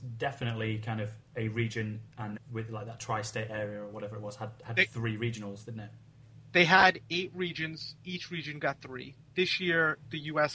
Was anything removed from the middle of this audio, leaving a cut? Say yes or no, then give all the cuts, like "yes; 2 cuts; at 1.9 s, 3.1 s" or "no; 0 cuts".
yes; 1 cut; at 2.4 s